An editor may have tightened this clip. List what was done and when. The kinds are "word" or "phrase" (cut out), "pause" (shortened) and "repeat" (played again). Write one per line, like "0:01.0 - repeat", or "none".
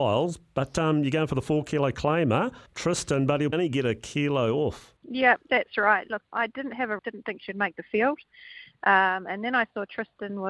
0:02.7 - pause
0:03.5 - word
0:05.0 - pause
0:06.3 - word
0:07.0 - phrase